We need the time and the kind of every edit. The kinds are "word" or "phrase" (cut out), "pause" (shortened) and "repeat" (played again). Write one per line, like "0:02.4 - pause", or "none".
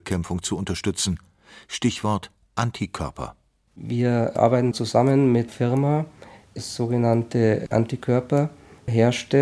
0:04.7 - word
0:05.5 - word
0:06.6 - word
0:07.7 - word